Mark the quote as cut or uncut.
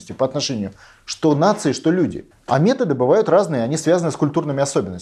cut